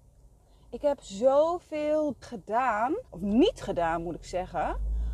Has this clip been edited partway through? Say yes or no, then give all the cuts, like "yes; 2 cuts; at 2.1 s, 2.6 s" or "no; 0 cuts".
yes; 2 cuts; at 2.2 s, 3.1 s